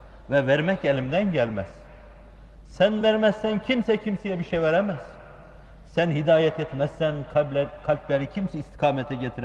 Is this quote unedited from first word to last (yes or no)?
yes